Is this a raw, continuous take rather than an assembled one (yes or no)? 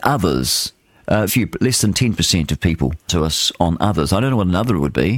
no